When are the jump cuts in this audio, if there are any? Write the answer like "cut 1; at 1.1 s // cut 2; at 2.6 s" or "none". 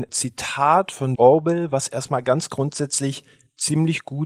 cut 1; at 1.2 s

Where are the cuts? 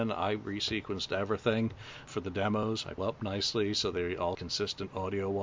cut 1; at 2.1 s // cut 2; at 3.0 s // cut 3; at 4.3 s

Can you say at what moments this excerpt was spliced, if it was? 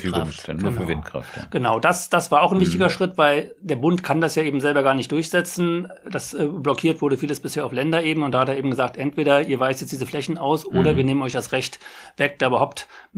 none

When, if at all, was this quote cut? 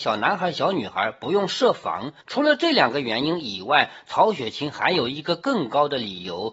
cut 1; at 2.2 s

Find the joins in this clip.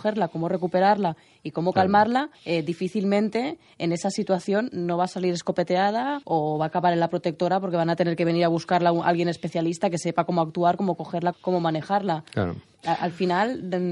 cut 1; at 2.3 s // cut 2; at 6.2 s // cut 3; at 11.3 s

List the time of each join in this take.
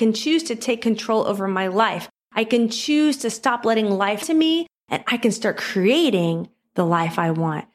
cut 1; at 4.2 s

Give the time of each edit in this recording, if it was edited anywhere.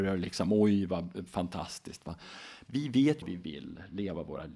cut 1; at 3.2 s

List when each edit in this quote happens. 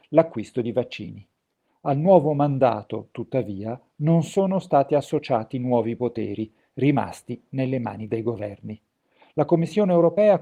none

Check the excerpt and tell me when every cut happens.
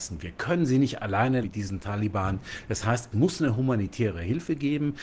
cut 1; at 1.4 s // cut 2; at 3.1 s

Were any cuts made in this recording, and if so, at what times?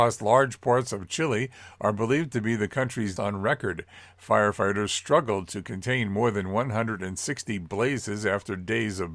cut 1; at 3.2 s

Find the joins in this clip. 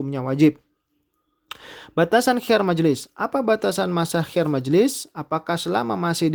none

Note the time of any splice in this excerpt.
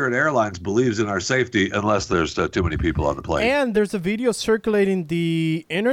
none

